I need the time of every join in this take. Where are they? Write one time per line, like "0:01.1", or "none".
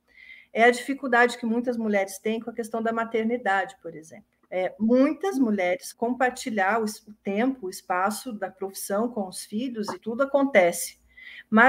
0:04.4
0:05.9
0:10.0